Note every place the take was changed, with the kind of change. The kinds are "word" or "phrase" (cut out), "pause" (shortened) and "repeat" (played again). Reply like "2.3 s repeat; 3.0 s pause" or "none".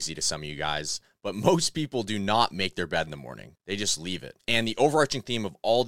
none